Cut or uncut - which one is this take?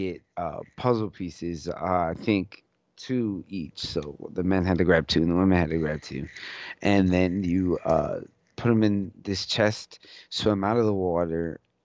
uncut